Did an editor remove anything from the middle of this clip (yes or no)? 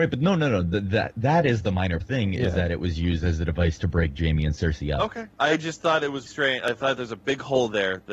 yes